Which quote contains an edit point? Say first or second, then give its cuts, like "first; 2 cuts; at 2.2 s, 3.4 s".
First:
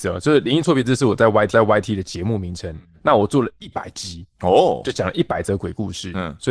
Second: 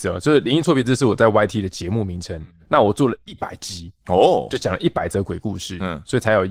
first; 1 cut; at 1.5 s